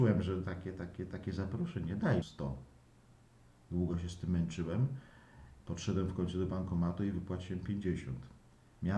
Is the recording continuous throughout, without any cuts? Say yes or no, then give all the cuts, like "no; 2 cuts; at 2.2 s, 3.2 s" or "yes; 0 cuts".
no; 1 cut; at 2.2 s